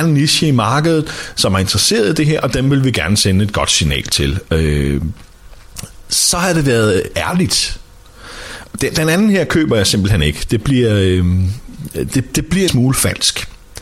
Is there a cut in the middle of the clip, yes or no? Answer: yes